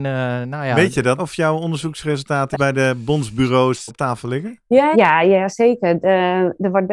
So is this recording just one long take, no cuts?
no; 4 cuts; at 1.2 s, 2.5 s, 3.9 s, 4.9 s

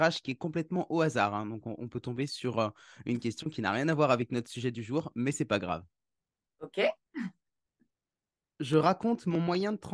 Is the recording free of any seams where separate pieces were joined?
yes; 0 cuts

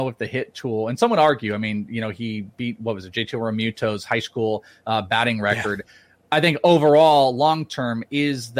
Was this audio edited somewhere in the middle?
no; 0 cuts

